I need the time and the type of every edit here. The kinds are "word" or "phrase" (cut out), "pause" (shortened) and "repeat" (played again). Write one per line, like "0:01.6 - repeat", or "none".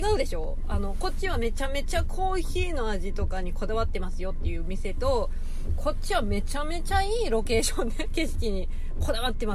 0:08.1 - word